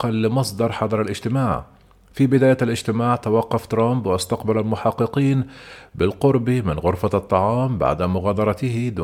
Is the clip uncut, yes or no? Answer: yes